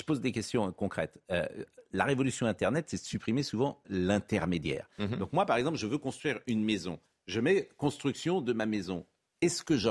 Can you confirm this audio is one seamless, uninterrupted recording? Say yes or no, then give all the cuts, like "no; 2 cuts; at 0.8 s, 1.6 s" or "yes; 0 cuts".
no; 1 cut; at 3.8 s